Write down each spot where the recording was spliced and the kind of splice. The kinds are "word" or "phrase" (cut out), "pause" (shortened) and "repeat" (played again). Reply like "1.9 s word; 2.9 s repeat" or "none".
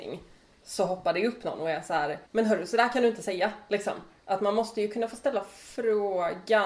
2.3 s pause

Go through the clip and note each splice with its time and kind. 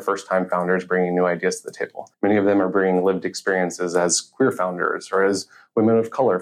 2.1 s pause

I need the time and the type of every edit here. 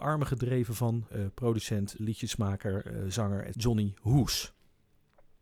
1.1 s phrase; 2.0 s word

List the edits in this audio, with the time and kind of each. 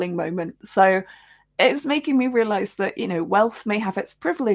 none

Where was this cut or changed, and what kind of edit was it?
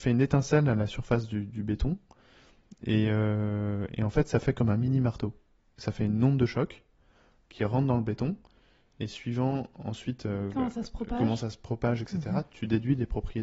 none

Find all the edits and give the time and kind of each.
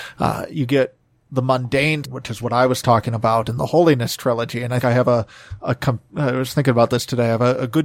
2.0 s word; 4.8 s word

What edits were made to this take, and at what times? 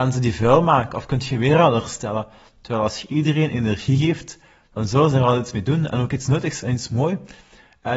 none

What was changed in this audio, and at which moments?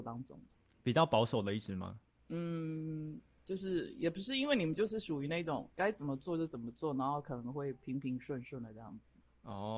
5.8 s word

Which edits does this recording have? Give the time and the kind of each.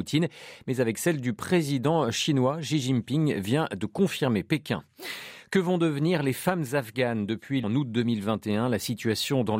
7.6 s phrase

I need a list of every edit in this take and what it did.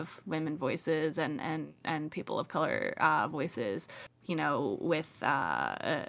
none

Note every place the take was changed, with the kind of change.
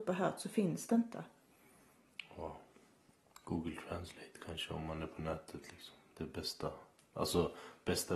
none

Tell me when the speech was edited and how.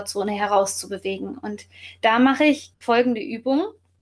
2.7 s word

